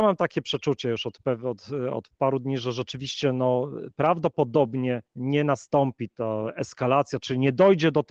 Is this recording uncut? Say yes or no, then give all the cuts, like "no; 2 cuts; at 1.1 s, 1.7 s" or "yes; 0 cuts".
no; 1 cut; at 5.1 s